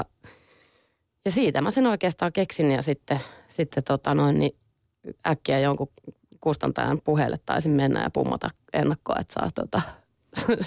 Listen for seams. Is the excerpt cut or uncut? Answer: uncut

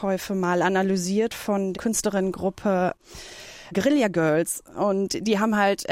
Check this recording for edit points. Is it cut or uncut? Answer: cut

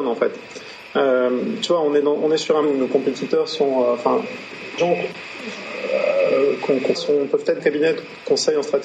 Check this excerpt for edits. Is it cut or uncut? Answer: cut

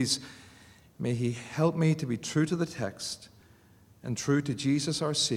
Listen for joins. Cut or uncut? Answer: uncut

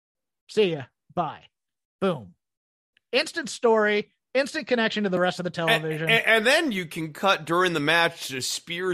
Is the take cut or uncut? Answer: uncut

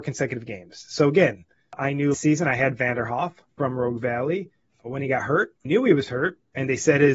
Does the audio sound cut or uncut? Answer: cut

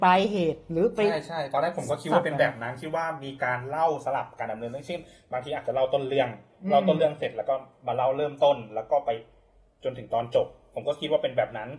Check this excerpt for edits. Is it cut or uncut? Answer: uncut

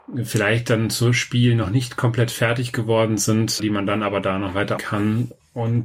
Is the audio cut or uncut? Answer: cut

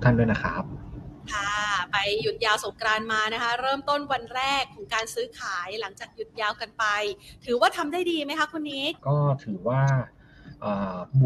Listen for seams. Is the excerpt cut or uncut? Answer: cut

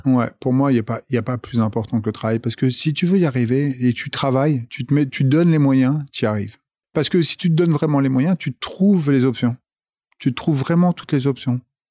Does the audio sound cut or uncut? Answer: uncut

